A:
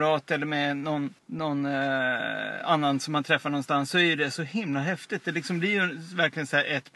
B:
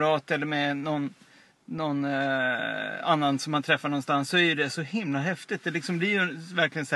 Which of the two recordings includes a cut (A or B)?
A